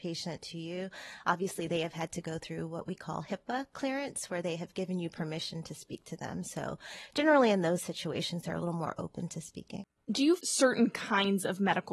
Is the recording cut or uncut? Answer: cut